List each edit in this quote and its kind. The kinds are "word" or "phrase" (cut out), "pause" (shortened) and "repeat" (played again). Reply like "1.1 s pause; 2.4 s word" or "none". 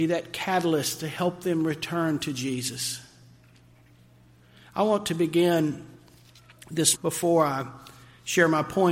6.9 s word